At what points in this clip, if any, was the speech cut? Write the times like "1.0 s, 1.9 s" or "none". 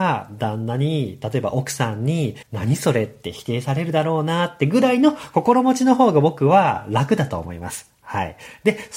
2.4 s